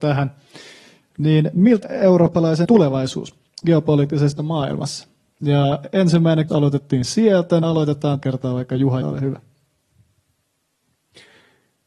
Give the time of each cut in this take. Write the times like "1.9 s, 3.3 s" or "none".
1.8 s, 2.6 s, 4.4 s, 6.5 s, 7.6 s, 8.2 s, 9.0 s